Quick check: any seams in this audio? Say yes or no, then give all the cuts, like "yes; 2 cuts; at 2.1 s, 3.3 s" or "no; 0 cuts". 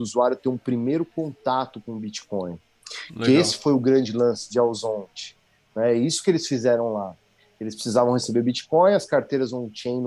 no; 0 cuts